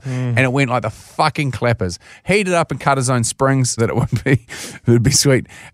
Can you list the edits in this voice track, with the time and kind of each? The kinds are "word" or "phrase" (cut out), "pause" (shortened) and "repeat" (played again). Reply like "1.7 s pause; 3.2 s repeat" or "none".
3.8 s word

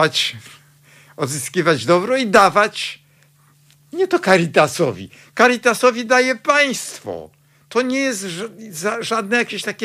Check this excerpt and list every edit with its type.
none

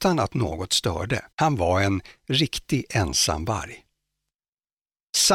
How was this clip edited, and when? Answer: 1.3 s pause

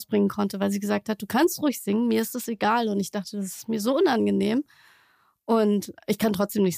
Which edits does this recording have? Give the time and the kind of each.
none

